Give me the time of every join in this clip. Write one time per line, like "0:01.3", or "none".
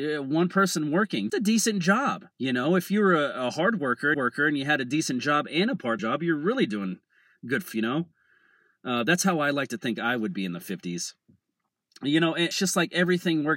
0:01.3
0:02.3
0:04.1
0:06.0
0:07.7
0:12.5